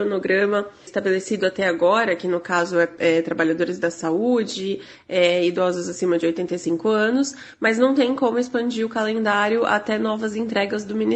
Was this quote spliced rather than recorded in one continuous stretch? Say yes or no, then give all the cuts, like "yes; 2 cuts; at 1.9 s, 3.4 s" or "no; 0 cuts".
no; 0 cuts